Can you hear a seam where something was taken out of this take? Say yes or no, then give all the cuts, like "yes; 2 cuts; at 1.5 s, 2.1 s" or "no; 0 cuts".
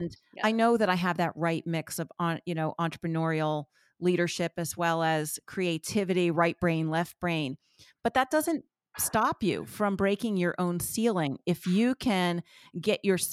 no; 0 cuts